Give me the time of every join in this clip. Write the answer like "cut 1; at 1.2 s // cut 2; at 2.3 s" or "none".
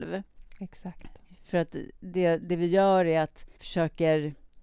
cut 1; at 3.6 s